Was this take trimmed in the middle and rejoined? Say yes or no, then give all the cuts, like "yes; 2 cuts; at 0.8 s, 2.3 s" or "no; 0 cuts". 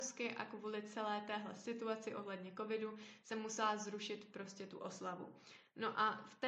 no; 0 cuts